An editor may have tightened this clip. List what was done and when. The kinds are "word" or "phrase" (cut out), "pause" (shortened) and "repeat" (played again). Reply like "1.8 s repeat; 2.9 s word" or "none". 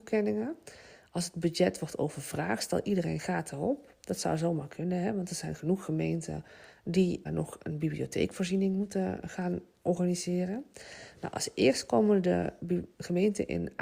7.3 s word

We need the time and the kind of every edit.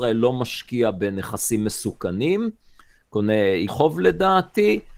3.7 s word

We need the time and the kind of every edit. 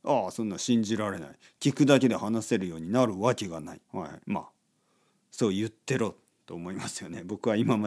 3.8 s pause; 4.2 s pause

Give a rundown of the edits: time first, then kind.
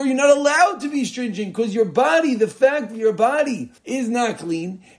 3.8 s pause

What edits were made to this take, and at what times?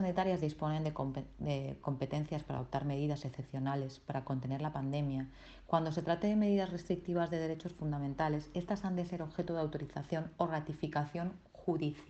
none

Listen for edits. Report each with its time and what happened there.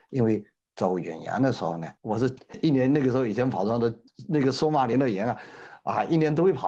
2.0 s pause

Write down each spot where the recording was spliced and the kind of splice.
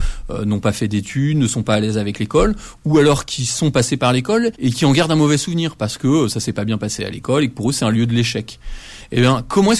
4.5 s pause

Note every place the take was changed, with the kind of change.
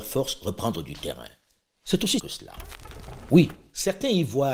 2.2 s word

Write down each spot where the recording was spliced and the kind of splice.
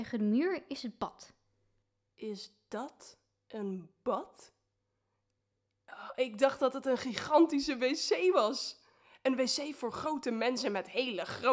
none

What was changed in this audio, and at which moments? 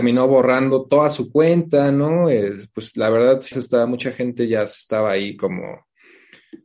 3.5 s word

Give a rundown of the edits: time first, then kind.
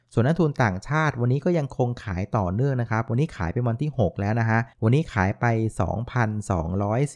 4.7 s pause

